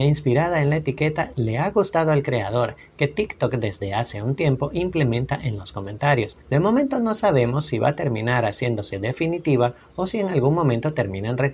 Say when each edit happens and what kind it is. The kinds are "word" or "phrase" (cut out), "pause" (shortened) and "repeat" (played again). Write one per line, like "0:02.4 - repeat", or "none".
0:06.4 - pause